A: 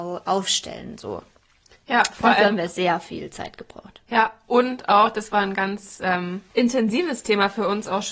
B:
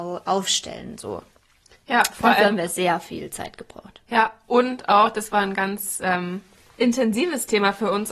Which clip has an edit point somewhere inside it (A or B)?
A